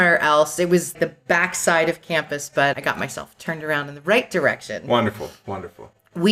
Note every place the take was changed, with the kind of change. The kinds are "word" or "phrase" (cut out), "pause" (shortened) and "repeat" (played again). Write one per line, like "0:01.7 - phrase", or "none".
0:00.9 - word
0:02.7 - word